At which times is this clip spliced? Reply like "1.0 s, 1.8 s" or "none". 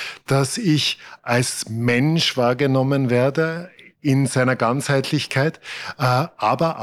none